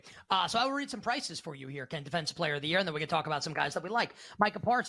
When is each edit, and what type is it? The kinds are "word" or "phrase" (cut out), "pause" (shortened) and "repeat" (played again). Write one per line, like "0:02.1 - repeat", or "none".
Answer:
none